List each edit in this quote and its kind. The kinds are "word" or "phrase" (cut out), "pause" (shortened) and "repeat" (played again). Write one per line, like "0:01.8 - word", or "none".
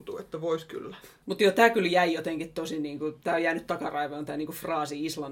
none